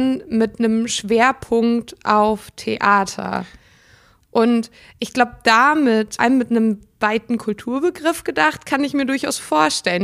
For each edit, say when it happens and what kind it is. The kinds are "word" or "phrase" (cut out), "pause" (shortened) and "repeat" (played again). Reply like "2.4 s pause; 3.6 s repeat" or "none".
6.2 s word

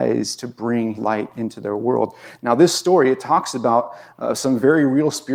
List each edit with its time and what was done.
0.9 s word

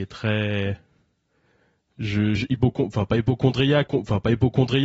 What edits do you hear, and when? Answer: 2.4 s word; 3.9 s repeat

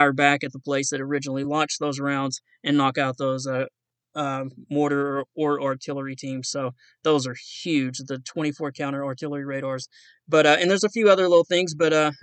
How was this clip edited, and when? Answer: none

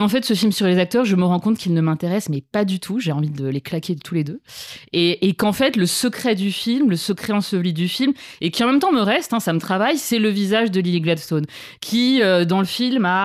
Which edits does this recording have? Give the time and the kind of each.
none

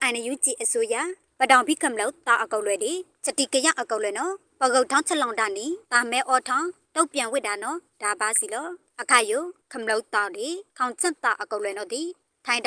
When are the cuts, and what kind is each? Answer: 5.8 s pause; 10.7 s pause

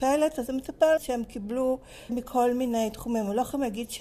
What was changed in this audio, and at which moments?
1.0 s phrase; 2.1 s word

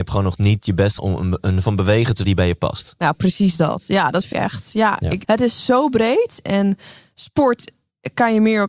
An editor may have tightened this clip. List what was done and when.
1.0 s word; 1.6 s word; 2.2 s word; 4.3 s word; 5.2 s word; 6.5 s word

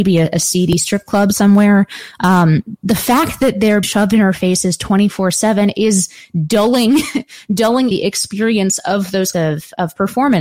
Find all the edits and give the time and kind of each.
3.8 s word; 7.9 s word; 9.3 s word

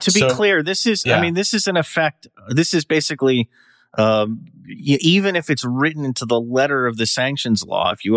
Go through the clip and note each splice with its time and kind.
none

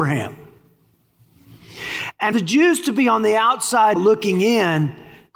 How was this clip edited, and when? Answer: 2.3 s word; 4.0 s word

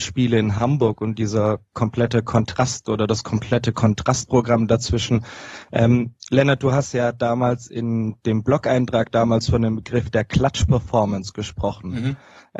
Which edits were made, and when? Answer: none

